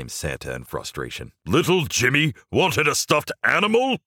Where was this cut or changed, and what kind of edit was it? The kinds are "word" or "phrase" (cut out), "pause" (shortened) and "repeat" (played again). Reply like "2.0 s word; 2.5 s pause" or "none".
1.4 s pause